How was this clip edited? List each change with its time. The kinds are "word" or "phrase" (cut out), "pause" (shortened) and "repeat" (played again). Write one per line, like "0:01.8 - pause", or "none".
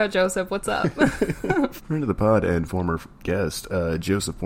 0:03.1 - pause